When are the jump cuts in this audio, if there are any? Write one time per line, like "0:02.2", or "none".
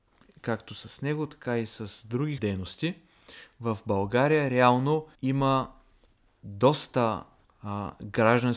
0:02.4
0:05.1